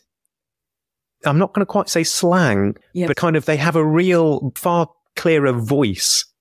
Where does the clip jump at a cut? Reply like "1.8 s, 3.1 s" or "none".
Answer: 2.8 s, 3.1 s, 4.6 s